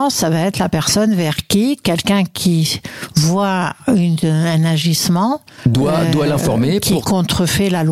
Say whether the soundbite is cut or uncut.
uncut